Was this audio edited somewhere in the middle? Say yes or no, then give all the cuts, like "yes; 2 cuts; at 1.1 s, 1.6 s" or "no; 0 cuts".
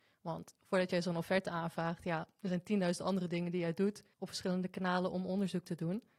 yes; 1 cut; at 4.1 s